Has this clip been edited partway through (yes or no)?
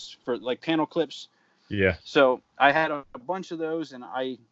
no